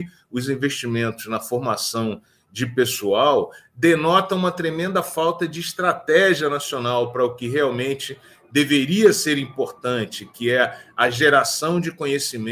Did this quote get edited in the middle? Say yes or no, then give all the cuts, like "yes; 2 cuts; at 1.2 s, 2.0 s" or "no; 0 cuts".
no; 0 cuts